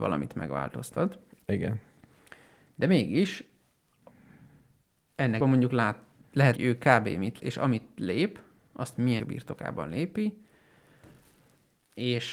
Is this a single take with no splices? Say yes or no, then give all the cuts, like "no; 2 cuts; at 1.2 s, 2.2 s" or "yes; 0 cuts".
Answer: no; 4 cuts; at 5.4 s, 6.6 s, 7.4 s, 9.2 s